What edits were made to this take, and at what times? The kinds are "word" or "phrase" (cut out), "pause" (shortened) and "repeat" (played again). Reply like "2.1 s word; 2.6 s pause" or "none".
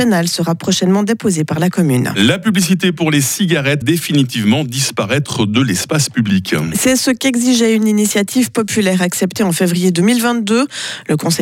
3.8 s word